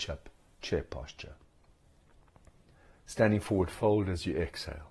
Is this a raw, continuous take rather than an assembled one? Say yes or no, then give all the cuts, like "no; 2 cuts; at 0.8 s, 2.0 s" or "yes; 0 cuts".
yes; 0 cuts